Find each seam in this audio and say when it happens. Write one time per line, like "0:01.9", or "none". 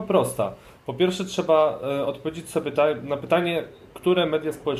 none